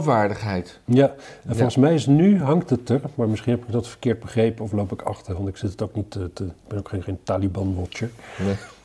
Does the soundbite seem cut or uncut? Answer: uncut